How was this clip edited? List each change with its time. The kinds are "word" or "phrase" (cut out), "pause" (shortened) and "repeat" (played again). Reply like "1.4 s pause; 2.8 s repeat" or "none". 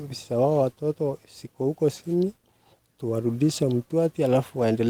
none